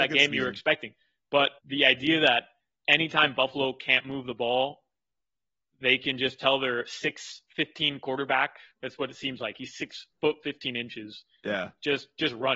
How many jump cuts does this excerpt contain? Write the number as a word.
one